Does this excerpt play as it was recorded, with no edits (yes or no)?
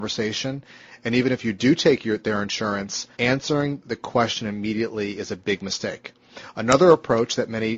no